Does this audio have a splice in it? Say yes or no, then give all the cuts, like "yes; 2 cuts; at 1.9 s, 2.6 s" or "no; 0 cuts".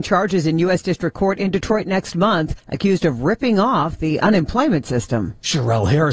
yes; 1 cut; at 2.6 s